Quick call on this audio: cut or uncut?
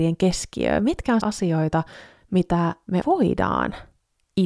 cut